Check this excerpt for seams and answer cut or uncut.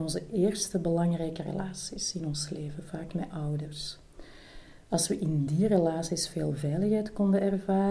uncut